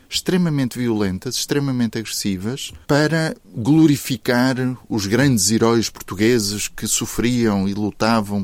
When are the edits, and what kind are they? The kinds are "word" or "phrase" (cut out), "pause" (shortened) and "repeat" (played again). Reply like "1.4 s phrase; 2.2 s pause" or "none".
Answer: 2.8 s pause